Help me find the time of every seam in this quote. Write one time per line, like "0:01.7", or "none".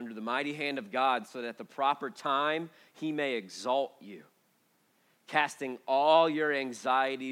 none